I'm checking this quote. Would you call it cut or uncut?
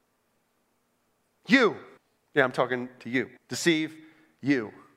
cut